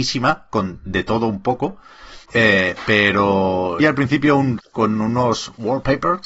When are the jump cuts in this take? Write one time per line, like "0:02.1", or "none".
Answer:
0:02.2
0:03.8
0:04.6